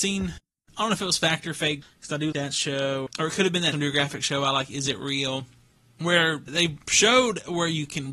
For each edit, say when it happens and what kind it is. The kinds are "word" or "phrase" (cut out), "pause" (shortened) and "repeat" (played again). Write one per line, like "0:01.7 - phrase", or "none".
0:02.3 - word
0:03.1 - word
0:03.7 - word

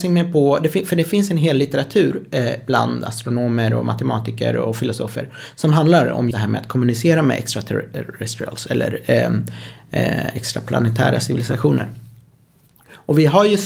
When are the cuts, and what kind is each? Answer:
0:06.3 - word

